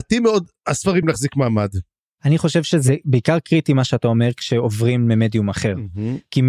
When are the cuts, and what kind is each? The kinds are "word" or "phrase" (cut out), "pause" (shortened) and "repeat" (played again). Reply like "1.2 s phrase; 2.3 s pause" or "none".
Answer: 1.0 s word

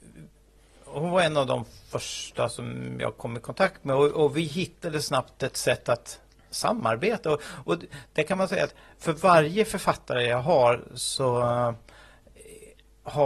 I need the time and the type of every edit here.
none

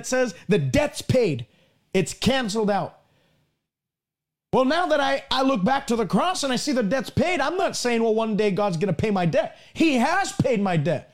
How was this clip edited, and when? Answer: none

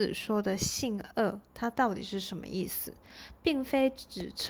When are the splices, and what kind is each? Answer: 1.5 s pause

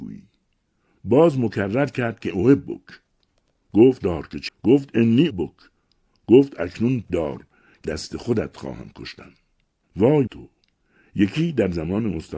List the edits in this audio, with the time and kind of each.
2.3 s word; 4.0 s word; 4.5 s word; 5.3 s word; 7.1 s word; 7.8 s word; 10.3 s word

